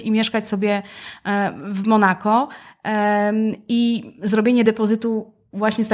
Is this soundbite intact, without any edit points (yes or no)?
yes